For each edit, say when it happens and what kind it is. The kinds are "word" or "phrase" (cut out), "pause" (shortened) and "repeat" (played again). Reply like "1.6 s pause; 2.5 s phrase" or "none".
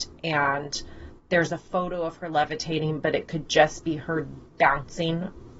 none